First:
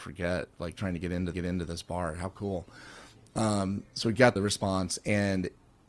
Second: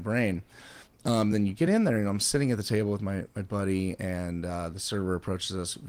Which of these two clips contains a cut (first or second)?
first